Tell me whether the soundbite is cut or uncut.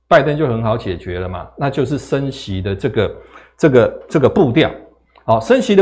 uncut